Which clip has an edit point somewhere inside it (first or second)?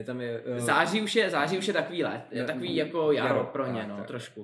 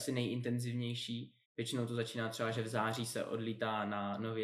second